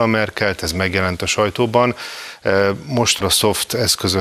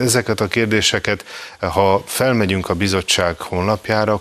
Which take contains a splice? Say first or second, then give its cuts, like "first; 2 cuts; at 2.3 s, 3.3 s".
first; 1 cut; at 3.2 s